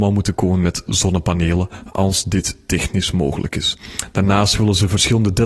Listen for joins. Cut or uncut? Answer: uncut